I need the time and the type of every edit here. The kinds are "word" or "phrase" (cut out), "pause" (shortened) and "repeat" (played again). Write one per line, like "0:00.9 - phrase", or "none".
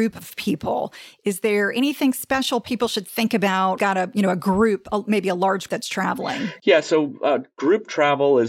0:03.8 - phrase
0:05.7 - word